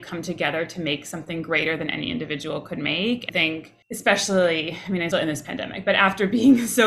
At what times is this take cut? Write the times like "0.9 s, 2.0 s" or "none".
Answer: 3.3 s, 3.8 s, 5.1 s